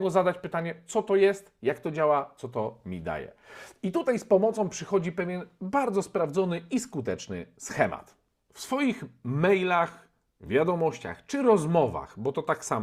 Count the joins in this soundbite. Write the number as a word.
zero